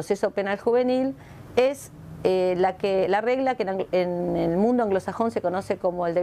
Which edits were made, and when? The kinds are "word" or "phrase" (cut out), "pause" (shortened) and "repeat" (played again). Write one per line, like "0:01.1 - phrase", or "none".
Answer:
none